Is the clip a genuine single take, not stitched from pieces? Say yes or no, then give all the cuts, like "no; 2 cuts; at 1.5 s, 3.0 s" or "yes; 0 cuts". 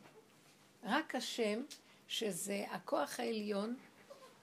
yes; 0 cuts